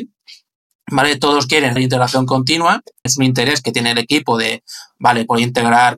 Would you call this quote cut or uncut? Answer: cut